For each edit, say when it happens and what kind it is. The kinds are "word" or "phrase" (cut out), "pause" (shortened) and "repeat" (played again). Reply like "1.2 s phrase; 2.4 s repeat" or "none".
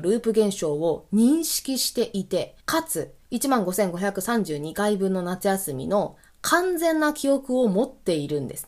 2.6 s pause; 3.2 s pause